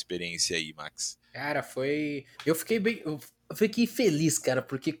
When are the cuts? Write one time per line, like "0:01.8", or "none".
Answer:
0:01.2
0:02.3
0:03.3